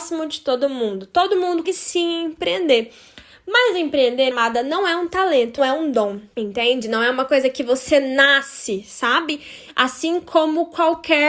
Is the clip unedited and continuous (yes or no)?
no